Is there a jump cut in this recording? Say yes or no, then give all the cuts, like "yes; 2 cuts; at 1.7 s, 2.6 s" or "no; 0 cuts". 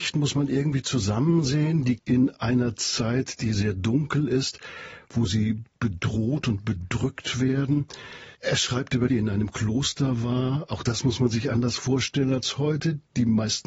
yes; 3 cuts; at 2.0 s, 8.3 s, 9.1 s